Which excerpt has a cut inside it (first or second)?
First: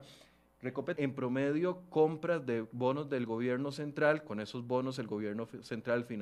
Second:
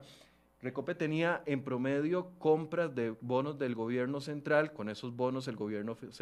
first